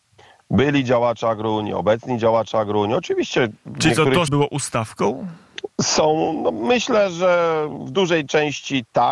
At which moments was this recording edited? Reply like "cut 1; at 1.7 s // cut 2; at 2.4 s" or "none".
cut 1; at 4.3 s